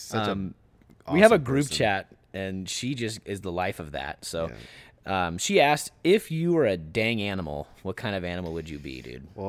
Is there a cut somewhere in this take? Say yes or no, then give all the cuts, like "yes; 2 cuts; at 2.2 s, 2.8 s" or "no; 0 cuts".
no; 0 cuts